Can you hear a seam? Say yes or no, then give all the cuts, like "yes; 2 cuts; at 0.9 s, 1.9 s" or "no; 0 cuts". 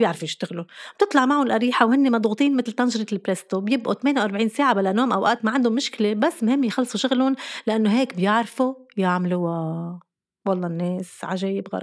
no; 0 cuts